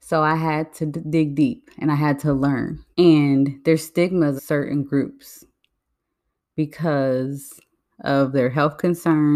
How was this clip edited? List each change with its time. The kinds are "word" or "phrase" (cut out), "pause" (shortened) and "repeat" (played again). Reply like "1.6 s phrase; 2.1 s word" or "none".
2.9 s pause; 4.4 s word